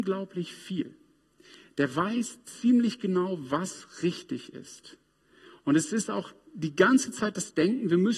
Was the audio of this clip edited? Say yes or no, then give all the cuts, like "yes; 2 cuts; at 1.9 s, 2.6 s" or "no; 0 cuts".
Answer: no; 0 cuts